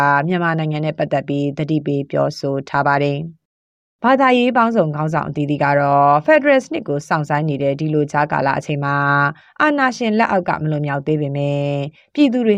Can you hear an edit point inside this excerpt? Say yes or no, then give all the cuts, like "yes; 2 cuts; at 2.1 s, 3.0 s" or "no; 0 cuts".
no; 0 cuts